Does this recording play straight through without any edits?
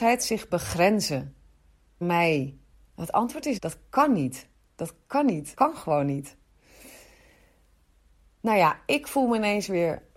no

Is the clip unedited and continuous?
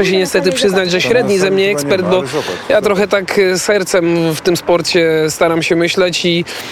yes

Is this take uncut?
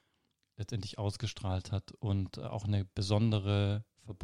yes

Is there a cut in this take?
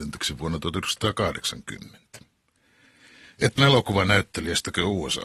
yes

